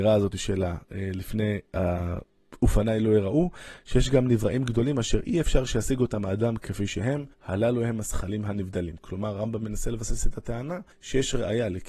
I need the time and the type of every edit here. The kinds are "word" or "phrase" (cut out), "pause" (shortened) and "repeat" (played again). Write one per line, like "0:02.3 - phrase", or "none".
0:01.7 - pause
0:07.3 - pause
0:10.9 - pause